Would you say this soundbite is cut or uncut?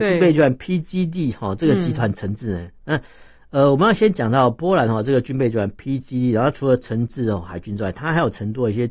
uncut